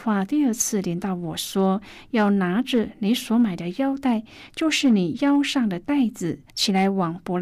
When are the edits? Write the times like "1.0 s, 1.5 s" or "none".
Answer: 6.5 s